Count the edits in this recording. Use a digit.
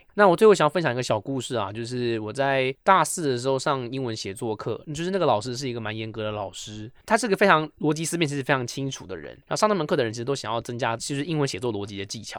1